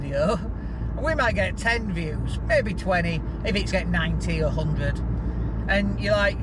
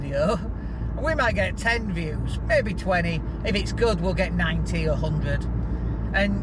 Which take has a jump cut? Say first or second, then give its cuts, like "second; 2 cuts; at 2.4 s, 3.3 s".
first; 1 cut; at 3.7 s